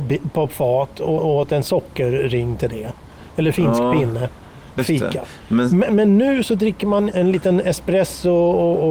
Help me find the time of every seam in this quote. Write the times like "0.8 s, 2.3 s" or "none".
1.2 s, 3.5 s, 4.8 s, 5.9 s, 7.1 s

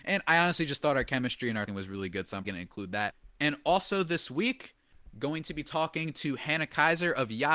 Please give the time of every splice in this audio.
1.7 s, 2.4 s

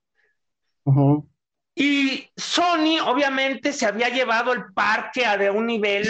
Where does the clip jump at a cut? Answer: none

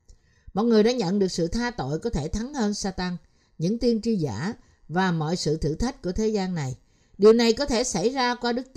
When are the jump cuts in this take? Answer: none

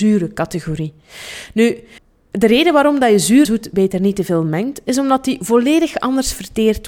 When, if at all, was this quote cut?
2.0 s, 3.4 s

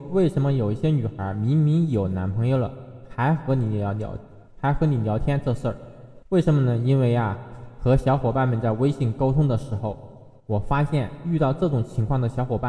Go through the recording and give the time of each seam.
4.5 s, 6.2 s, 10.4 s

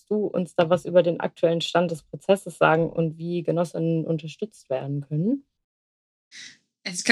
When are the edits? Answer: none

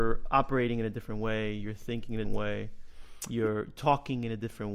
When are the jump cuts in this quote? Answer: 2.2 s

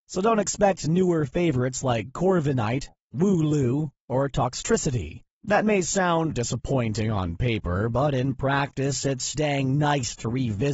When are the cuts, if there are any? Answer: 6.3 s, 9.3 s

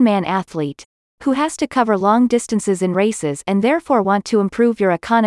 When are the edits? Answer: none

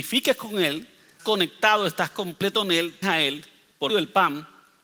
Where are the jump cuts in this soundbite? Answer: 1.2 s, 3.0 s, 3.9 s

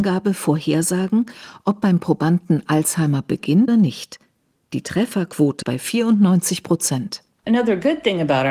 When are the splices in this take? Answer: 3.7 s, 5.6 s

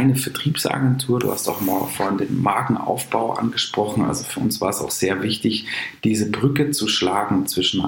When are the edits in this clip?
none

